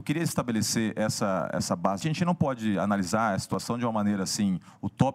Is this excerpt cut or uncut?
cut